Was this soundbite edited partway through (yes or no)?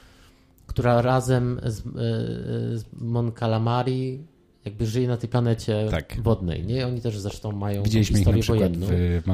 no